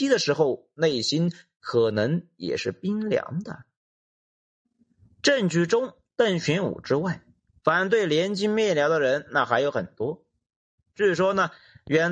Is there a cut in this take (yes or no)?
no